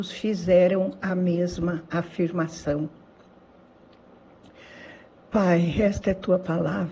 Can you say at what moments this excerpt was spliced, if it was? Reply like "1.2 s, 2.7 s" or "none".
none